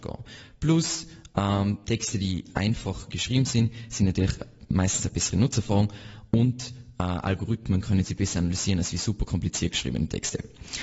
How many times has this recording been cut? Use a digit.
0